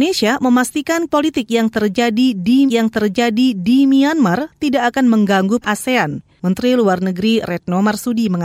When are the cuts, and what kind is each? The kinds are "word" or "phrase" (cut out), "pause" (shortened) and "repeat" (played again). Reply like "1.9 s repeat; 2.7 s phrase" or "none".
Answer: 1.1 s word; 2.7 s repeat; 5.6 s phrase

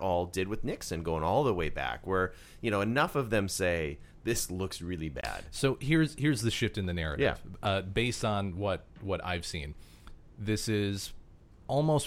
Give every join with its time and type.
none

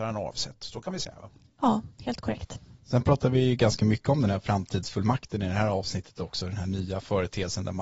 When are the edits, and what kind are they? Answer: 1.9 s pause; 2.8 s pause

